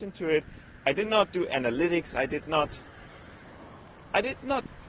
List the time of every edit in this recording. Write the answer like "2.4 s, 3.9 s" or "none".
1.5 s

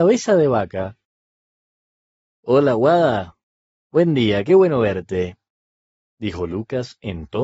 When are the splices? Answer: none

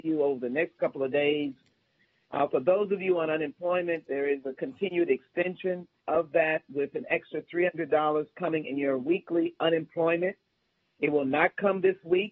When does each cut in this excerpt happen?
6.0 s

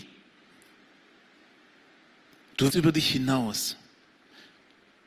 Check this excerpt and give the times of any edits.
2.7 s

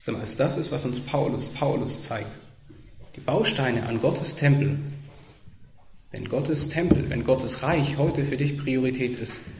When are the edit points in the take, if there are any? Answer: 1.5 s

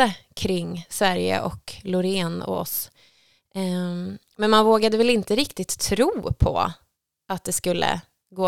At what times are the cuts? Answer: none

